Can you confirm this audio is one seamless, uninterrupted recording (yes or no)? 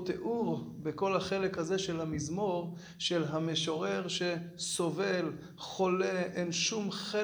yes